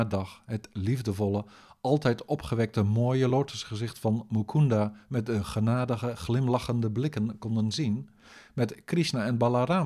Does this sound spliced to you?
no; 0 cuts

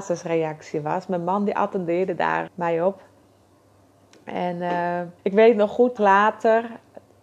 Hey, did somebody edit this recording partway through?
yes; 3 cuts; at 2.5 s, 5.2 s, 6.0 s

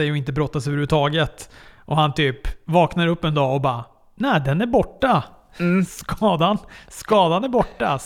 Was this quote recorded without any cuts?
yes; 0 cuts

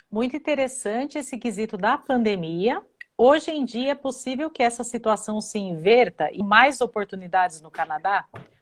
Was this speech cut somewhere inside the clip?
yes; 1 cut; at 6.4 s

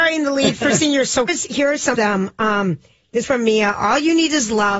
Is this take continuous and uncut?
no; 3 cuts; at 1.3 s, 1.9 s, 3.2 s

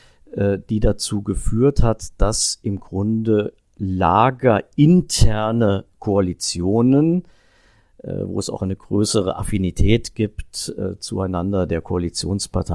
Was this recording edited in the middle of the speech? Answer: no; 0 cuts

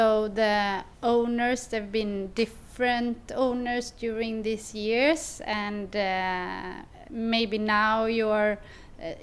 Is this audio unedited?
no; 1 cut; at 0.9 s

